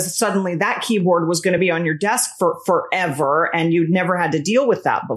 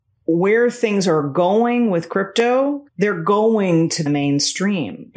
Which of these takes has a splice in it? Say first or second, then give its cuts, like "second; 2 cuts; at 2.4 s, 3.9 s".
second; 2 cuts; at 2.9 s, 4.1 s